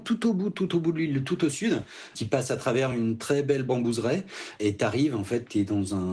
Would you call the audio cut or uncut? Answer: uncut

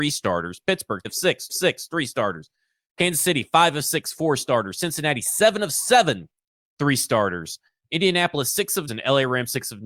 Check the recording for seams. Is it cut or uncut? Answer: cut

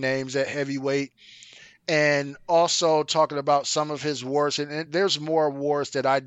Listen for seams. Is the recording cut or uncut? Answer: uncut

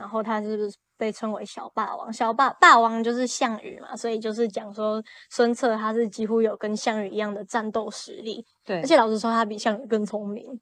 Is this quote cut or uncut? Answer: uncut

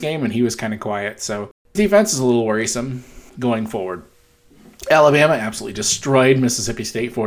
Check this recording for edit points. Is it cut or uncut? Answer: cut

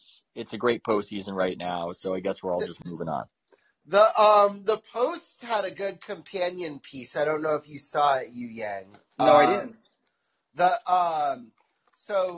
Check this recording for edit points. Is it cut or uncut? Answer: uncut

